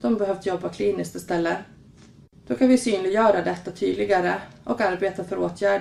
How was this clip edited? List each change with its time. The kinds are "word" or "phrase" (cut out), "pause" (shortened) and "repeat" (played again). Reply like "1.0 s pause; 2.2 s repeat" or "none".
none